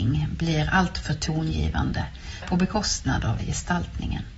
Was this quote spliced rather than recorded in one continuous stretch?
yes; 2 cuts; at 2.4 s, 3.4 s

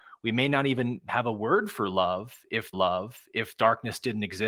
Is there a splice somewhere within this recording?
yes; 1 cut; at 2.7 s

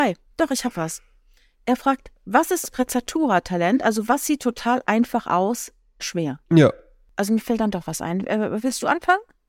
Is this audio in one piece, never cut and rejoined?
no; 3 cuts; at 2.6 s, 6.0 s, 6.4 s

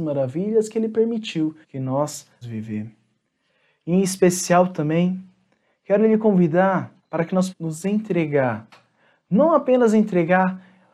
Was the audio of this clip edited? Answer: yes; 4 cuts; at 1.6 s, 2.4 s, 7.0 s, 7.5 s

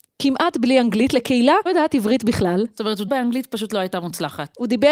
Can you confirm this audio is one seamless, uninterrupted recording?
no; 3 cuts; at 1.7 s, 3.1 s, 3.7 s

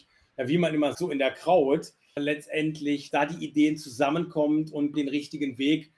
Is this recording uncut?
no; 4 cuts; at 0.9 s, 2.2 s, 3.1 s, 4.9 s

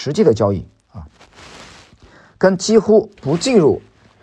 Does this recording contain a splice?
no; 0 cuts

